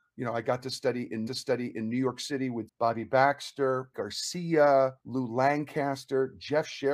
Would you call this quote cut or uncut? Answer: cut